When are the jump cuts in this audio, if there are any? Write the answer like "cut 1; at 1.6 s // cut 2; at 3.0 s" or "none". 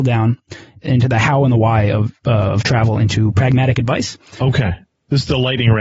none

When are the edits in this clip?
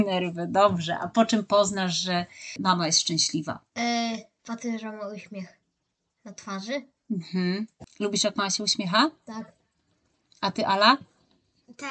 none

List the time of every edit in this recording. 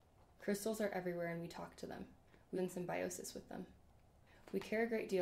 cut 1; at 2.6 s

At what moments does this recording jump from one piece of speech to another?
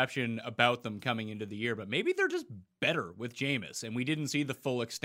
none

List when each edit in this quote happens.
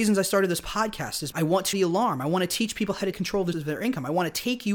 cut 1; at 1.3 s // cut 2; at 1.7 s // cut 3; at 3.1 s // cut 4; at 3.5 s

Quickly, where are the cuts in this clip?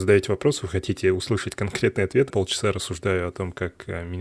cut 1; at 2.3 s

